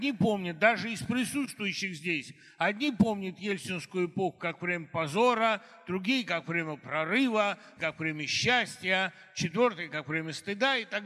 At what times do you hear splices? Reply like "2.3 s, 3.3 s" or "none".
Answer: 7.8 s

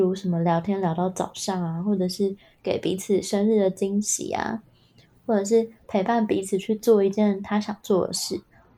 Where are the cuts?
none

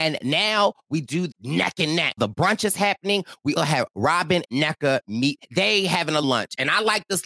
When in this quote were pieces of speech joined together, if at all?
1.3 s, 2.2 s, 3.6 s, 4.4 s, 5.4 s, 6.2 s

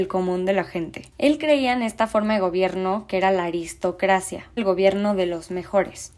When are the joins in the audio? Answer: 1.1 s, 4.6 s

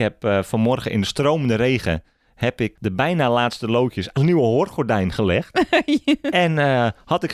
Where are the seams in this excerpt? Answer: 2.8 s, 4.2 s

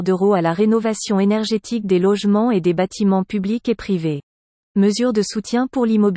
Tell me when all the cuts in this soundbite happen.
none

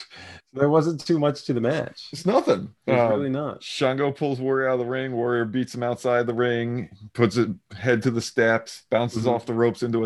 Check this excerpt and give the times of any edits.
2.8 s

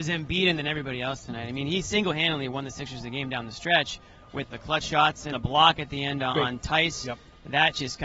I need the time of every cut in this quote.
4.5 s, 5.3 s

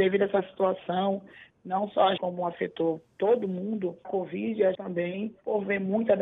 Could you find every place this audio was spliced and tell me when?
2.2 s, 4.0 s, 4.7 s

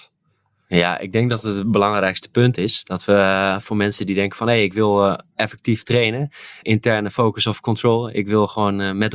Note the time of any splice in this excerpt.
6.6 s

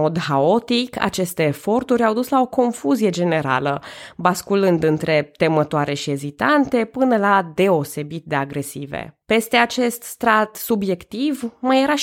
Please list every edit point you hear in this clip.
9.2 s

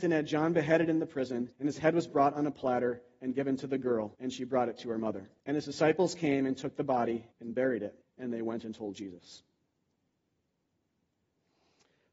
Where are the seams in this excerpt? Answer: 1.5 s, 4.1 s, 5.4 s, 7.3 s, 8.0 s

